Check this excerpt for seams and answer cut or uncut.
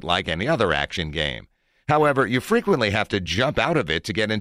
uncut